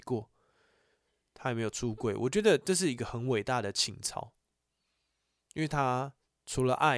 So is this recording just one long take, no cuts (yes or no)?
yes